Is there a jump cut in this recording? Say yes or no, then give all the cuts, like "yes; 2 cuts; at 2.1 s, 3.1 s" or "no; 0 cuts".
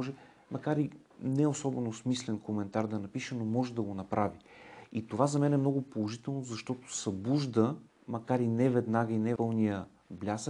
yes; 2 cuts; at 7.9 s, 9.4 s